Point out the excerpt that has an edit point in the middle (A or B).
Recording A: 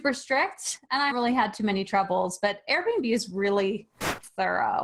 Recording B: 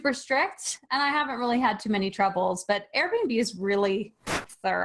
A